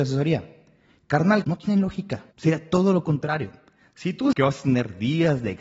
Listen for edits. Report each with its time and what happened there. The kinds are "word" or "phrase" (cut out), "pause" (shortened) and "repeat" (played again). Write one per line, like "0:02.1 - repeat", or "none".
0:01.4 - word
0:02.3 - pause
0:04.3 - word